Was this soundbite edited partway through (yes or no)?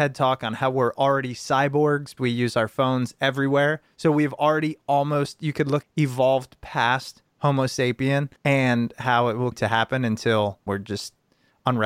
yes